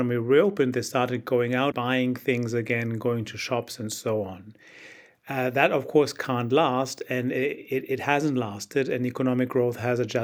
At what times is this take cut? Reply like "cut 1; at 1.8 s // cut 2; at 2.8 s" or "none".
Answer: cut 1; at 1.7 s